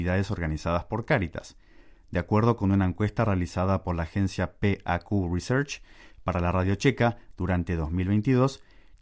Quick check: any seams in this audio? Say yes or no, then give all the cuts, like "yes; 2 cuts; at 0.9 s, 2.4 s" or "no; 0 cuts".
no; 0 cuts